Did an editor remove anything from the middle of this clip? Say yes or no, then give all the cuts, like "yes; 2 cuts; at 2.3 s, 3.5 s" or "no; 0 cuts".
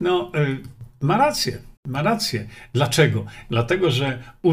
yes; 1 cut; at 1.8 s